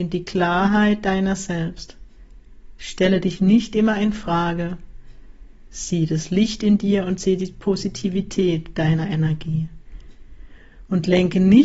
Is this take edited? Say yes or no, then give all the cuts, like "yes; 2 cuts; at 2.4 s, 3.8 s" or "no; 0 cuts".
no; 0 cuts